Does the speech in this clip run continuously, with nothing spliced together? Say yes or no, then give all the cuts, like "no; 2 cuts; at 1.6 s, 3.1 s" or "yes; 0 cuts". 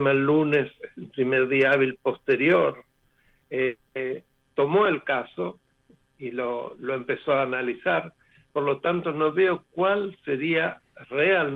yes; 0 cuts